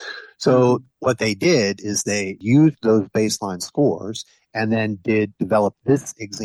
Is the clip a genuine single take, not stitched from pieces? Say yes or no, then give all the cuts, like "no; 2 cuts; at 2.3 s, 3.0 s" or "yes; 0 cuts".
yes; 0 cuts